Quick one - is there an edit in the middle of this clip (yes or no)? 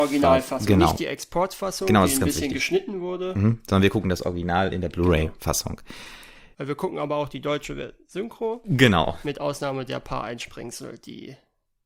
no